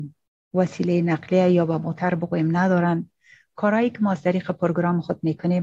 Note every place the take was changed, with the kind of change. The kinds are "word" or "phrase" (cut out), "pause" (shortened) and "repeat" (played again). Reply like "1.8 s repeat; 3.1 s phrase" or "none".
none